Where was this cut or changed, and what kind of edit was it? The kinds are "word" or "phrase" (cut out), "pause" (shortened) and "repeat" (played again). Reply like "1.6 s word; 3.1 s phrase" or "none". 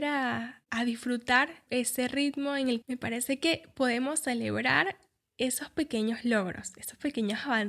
1.7 s word; 2.8 s phrase